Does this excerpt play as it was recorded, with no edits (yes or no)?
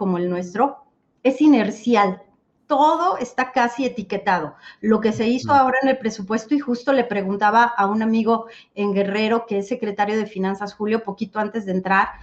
yes